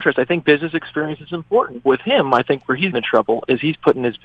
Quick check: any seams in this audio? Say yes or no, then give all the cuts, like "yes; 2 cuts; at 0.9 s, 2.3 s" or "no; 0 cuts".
yes; 2 cuts; at 1.9 s, 2.9 s